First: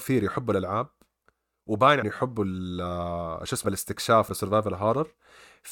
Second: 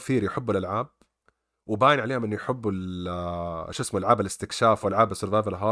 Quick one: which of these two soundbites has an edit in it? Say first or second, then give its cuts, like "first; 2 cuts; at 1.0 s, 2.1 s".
first; 3 cuts; at 2.0 s, 3.6 s, 4.3 s